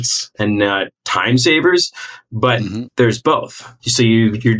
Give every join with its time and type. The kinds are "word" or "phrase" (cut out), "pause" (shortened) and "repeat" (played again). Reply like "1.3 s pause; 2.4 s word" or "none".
0.9 s pause; 2.9 s pause